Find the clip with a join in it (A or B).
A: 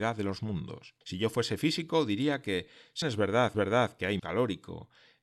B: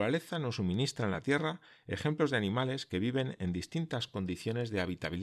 A